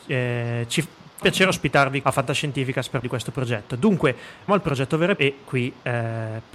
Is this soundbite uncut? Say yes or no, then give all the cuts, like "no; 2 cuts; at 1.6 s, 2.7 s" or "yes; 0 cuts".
no; 5 cuts; at 1.2 s, 2.0 s, 3.0 s, 4.5 s, 5.2 s